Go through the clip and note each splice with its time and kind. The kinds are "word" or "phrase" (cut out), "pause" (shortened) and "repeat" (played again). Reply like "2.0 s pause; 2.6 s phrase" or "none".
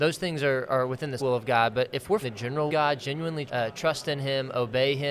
1.2 s word; 2.2 s word; 2.7 s phrase; 3.5 s phrase